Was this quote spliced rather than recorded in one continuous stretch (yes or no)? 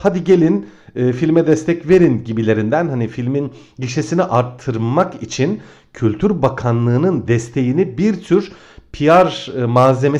no